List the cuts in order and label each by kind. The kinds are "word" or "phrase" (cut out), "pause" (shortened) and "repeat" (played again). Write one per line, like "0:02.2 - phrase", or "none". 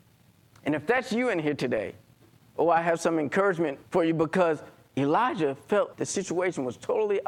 0:03.9 - pause
0:05.9 - word